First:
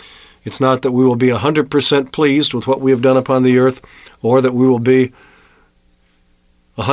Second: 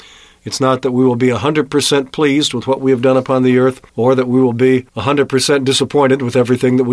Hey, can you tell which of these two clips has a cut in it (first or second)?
second